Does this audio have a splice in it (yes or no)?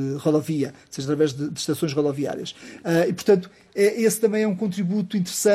no